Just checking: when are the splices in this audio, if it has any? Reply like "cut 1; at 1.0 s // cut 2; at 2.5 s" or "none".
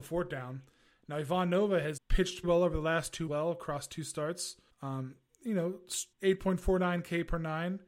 cut 1; at 2.0 s // cut 2; at 2.4 s // cut 3; at 3.3 s // cut 4; at 4.7 s // cut 5; at 6.1 s